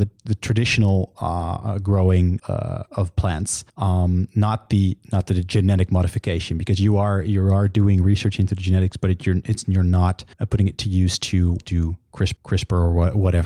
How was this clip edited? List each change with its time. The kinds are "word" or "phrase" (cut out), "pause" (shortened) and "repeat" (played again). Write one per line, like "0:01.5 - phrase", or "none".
0:02.4 - word
0:03.7 - pause
0:10.3 - pause
0:11.6 - word
0:12.4 - repeat